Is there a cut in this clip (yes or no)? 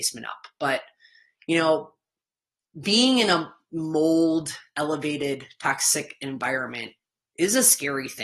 no